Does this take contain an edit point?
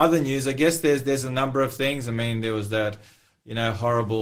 no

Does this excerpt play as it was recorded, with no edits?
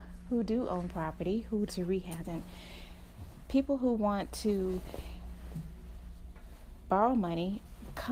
no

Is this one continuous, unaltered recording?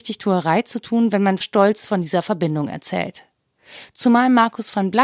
no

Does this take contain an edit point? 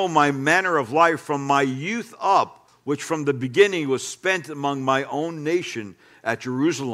no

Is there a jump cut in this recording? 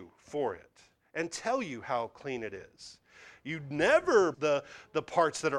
yes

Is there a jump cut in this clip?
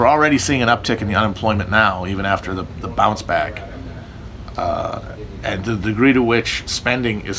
yes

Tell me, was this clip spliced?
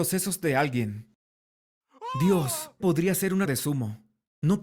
yes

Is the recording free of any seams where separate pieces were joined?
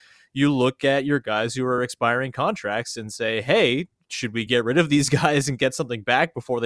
yes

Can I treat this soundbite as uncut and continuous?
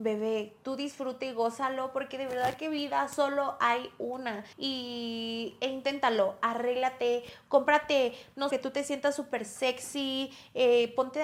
no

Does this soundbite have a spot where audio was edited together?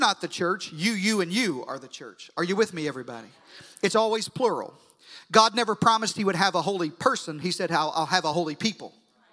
no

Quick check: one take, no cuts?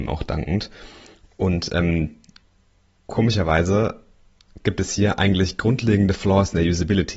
yes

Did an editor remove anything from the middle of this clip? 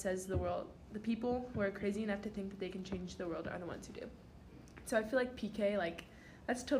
no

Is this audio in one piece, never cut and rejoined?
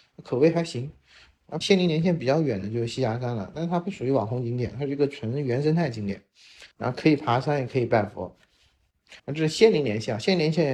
no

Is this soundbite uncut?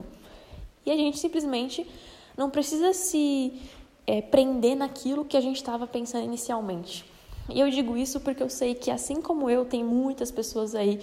yes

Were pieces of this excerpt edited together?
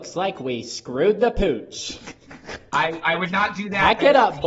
no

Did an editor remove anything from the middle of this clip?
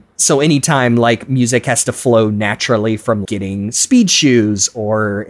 yes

